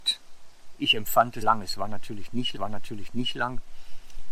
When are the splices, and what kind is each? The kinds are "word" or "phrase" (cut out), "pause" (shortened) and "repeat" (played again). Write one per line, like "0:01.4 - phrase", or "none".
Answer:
0:01.4 - word
0:02.6 - repeat